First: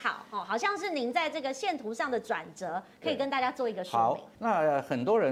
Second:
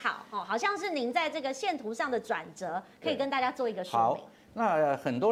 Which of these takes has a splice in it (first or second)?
first